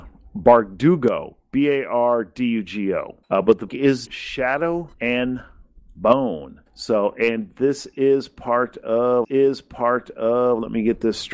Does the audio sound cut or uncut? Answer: cut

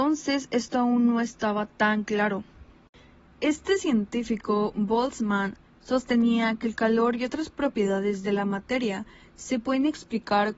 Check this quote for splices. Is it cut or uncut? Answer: uncut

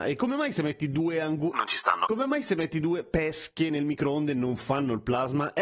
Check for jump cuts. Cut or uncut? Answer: uncut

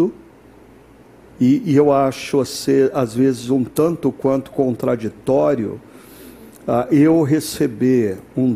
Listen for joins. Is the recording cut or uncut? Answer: uncut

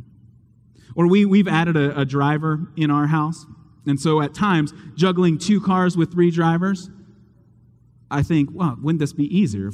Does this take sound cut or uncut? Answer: uncut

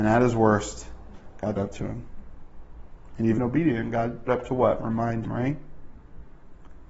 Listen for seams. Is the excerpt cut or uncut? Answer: cut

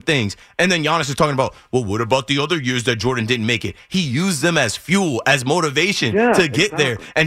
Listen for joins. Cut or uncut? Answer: uncut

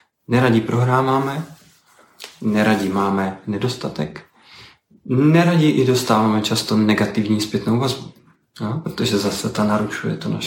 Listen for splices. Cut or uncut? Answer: uncut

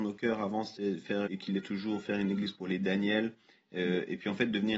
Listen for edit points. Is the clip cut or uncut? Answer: cut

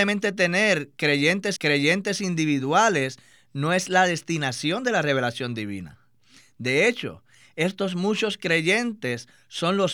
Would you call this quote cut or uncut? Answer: cut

